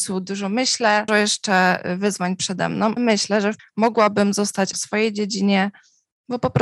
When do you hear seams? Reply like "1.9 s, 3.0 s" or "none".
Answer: 1.1 s, 3.0 s, 3.6 s, 4.7 s